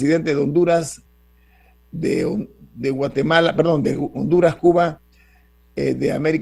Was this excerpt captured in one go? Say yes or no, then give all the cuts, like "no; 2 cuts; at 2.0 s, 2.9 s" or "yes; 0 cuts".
yes; 0 cuts